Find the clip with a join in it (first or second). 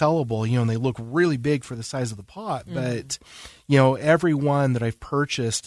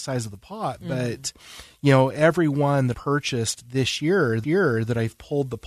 second